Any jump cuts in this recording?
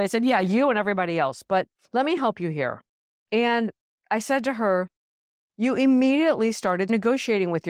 no; 0 cuts

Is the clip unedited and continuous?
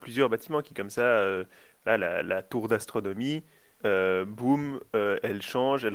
yes; 0 cuts

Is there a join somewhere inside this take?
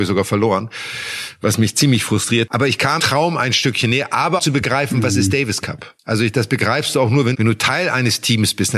yes; 5 cuts; at 2.5 s, 3.0 s, 4.4 s, 6.0 s, 7.3 s

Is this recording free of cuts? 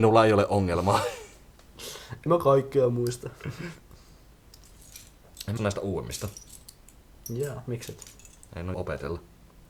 no; 3 cuts; at 2.3 s, 5.6 s, 8.7 s

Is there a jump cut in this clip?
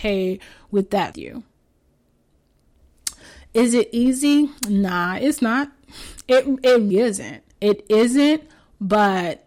yes; 4 cuts; at 1.1 s, 4.6 s, 6.9 s, 7.5 s

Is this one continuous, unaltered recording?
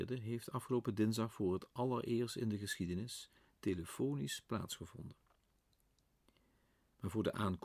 yes; 0 cuts

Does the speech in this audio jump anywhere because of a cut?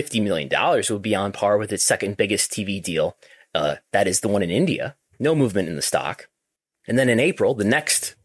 yes; 1 cut; at 5.1 s

